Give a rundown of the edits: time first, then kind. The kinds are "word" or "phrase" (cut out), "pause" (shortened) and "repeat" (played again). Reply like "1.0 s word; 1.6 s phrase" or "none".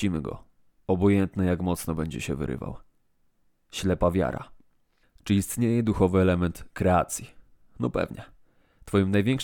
none

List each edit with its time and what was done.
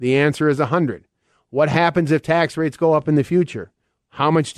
none

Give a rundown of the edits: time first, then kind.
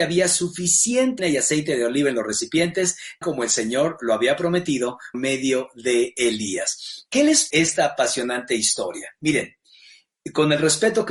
1.2 s word; 3.2 s word; 5.1 s word; 7.5 s word

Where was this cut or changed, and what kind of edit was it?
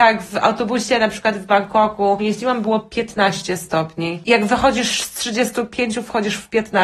2.2 s phrase

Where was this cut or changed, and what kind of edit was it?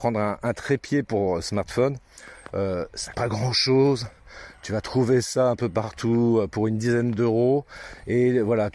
3.1 s word

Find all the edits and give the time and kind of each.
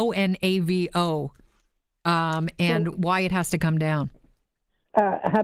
2.9 s word

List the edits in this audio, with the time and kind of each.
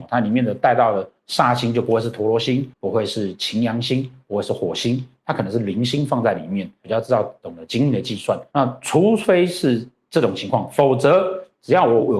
2.7 s pause

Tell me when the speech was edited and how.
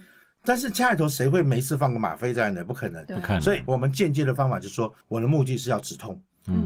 5.0 s pause

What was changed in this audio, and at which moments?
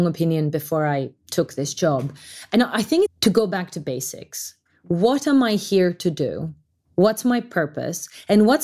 3.1 s phrase

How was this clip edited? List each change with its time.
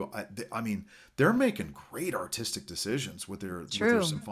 none

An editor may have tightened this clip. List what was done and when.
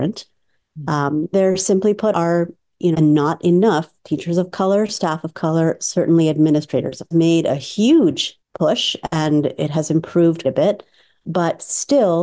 1.3 s word; 2.1 s word; 2.9 s word; 7.1 s phrase; 8.4 s pause; 10.4 s word

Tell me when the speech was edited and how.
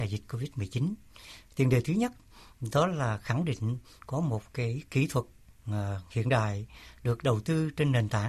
none

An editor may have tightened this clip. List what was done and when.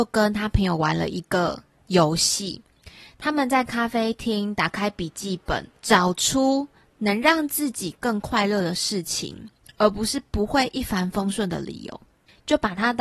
5.8 s pause

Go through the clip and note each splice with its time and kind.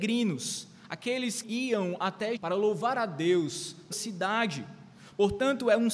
1.4 s word; 2.4 s word; 3.9 s word

